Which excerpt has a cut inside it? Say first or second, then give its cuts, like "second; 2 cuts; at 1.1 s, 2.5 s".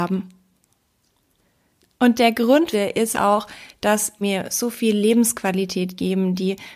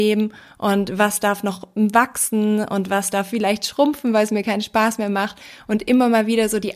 first; 3 cuts; at 2.7 s, 3.1 s, 4.2 s